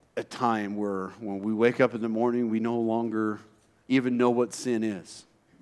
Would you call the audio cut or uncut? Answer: uncut